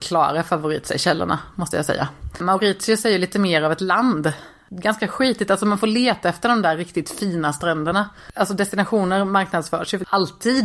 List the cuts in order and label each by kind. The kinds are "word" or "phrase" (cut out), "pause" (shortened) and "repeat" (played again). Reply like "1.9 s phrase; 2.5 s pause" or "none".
none